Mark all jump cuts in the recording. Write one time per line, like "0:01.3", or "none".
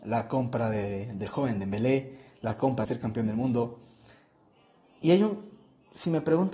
0:02.9